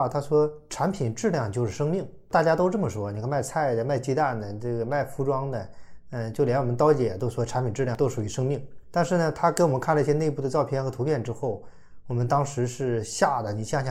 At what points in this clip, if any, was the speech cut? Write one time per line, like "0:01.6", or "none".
none